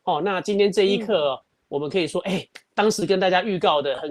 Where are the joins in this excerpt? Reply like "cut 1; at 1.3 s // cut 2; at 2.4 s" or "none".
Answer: none